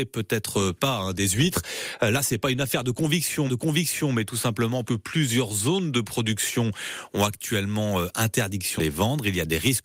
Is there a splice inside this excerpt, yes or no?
yes